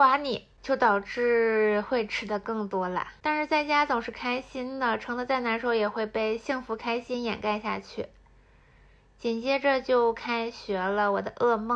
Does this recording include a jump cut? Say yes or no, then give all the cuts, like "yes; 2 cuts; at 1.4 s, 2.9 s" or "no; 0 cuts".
no; 0 cuts